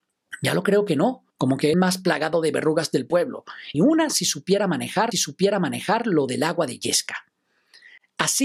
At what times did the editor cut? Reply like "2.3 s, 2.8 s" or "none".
1.3 s, 1.7 s, 3.7 s, 5.1 s